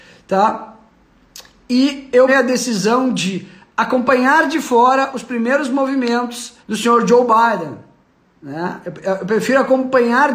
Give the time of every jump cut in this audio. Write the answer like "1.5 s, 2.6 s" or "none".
2.3 s, 6.6 s